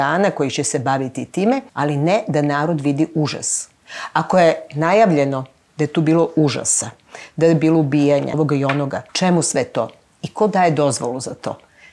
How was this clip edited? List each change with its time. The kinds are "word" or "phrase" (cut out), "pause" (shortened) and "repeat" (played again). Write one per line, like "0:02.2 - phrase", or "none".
0:01.7 - pause
0:08.3 - phrase
0:09.1 - pause